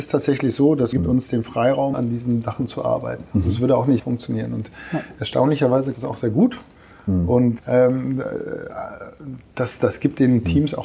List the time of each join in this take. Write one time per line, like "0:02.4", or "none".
0:00.9
0:01.9
0:04.0
0:05.9
0:07.6